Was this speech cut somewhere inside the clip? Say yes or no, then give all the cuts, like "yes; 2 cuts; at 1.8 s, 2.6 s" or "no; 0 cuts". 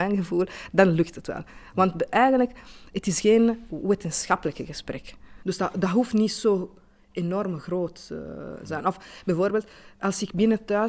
no; 0 cuts